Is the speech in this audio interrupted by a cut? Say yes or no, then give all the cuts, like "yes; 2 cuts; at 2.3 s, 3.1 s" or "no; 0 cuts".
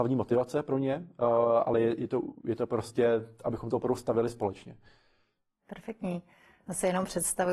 no; 0 cuts